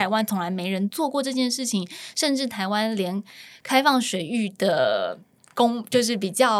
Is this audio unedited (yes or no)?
yes